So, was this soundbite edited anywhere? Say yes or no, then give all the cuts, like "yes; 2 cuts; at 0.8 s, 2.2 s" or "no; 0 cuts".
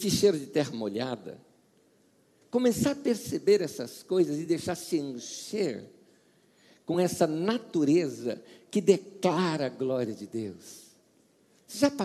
no; 0 cuts